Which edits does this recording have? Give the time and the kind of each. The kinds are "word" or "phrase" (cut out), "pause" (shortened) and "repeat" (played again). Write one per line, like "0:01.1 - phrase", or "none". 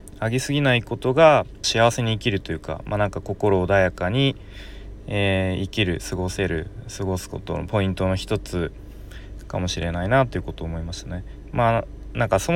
0:01.6 - phrase

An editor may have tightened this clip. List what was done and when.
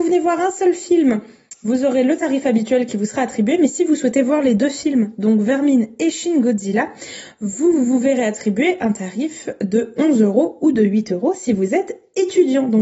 none

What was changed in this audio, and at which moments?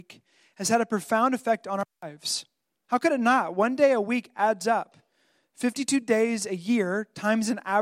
none

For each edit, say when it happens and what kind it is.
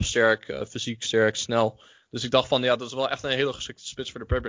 none

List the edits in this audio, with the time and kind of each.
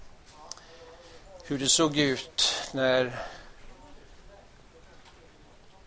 none

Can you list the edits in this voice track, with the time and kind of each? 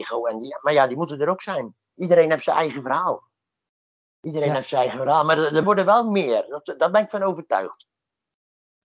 0:05.6 - word

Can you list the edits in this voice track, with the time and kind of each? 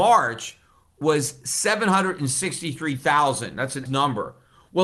0:03.9 - word

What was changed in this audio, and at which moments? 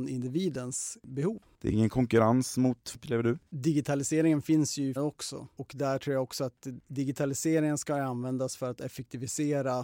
0:02.9 - word
0:03.5 - pause
0:05.0 - word

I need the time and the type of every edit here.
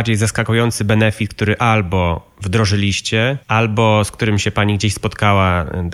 0:03.4 - pause

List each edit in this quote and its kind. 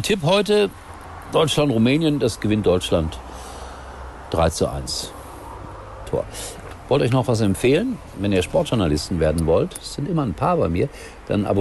0:06.1 - phrase

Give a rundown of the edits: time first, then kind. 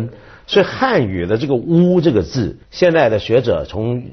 0:02.6 - pause

